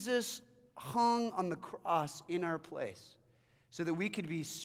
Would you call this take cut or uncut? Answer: uncut